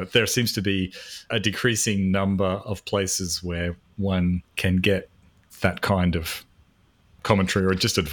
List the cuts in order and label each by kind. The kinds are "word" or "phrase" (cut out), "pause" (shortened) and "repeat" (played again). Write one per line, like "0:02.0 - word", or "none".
0:04.5 - pause